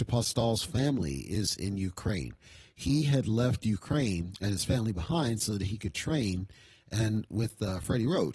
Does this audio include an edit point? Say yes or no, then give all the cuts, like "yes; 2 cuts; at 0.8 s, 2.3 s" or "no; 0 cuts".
no; 0 cuts